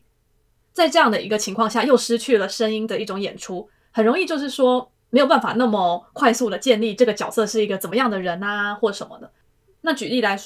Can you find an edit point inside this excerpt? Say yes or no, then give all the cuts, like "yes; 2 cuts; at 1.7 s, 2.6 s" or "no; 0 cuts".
yes; 1 cut; at 5.0 s